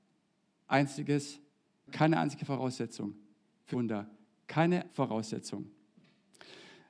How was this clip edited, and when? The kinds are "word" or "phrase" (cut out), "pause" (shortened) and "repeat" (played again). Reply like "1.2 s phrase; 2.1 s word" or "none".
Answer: 1.9 s word; 3.7 s word; 4.9 s word